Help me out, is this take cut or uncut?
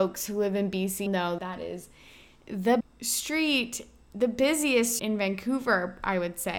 cut